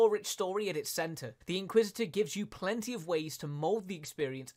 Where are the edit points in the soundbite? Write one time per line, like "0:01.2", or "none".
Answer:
0:01.4